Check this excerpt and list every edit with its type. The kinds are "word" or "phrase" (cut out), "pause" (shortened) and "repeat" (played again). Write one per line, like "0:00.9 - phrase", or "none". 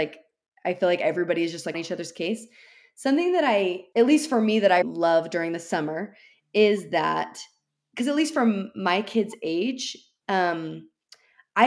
0:01.7 - word
0:03.9 - word
0:04.8 - word